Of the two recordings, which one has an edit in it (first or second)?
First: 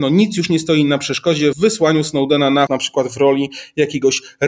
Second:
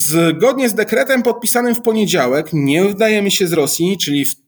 first